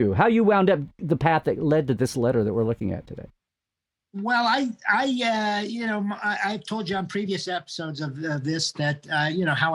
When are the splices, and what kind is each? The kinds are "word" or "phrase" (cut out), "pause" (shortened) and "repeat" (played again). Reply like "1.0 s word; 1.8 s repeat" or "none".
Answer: none